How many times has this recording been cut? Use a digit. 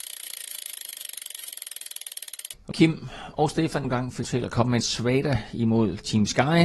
4